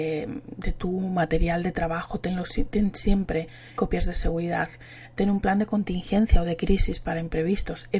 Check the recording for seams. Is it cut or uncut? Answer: cut